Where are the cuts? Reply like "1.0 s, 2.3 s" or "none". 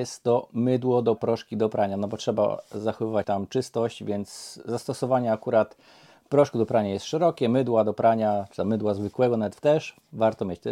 1.2 s, 3.2 s, 9.6 s